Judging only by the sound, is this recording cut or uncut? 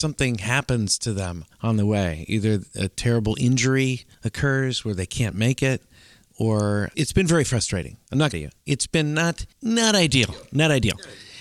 cut